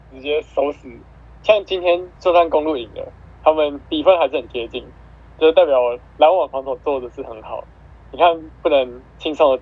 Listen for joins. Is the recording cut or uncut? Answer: cut